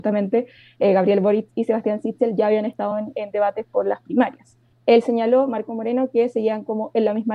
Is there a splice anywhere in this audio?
no; 0 cuts

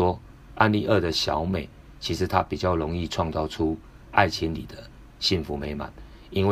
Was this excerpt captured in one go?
yes; 0 cuts

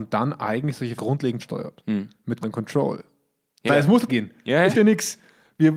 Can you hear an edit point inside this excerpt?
yes; 6 cuts; at 1.0 s, 1.4 s, 2.4 s, 3.7 s, 4.1 s, 4.7 s

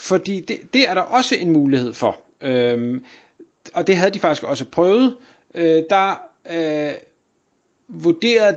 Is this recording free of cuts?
yes; 0 cuts

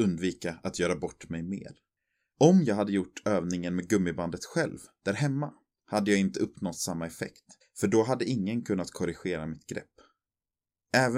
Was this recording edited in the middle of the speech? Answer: yes; 1 cut; at 7.6 s

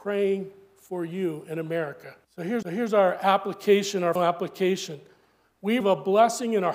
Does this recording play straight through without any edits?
no; 4 cuts; at 2.2 s, 2.6 s, 4.2 s, 5.8 s

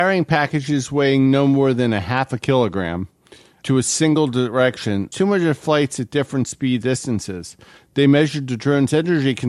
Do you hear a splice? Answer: yes; 2 cuts; at 5.1 s, 6.8 s

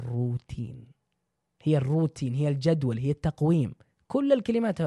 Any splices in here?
no; 0 cuts

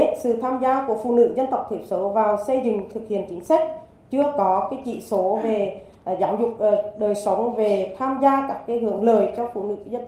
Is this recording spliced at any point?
no; 0 cuts

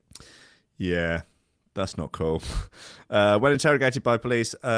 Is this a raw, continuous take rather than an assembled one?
yes; 0 cuts

